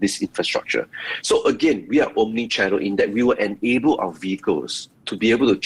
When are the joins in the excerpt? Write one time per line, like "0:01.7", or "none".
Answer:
none